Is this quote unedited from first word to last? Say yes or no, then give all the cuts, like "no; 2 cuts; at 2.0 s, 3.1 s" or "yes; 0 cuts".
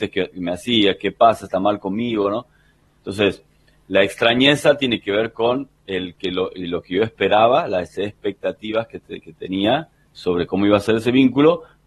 yes; 0 cuts